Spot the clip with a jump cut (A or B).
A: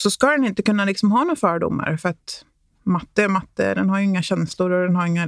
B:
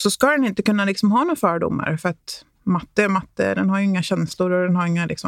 B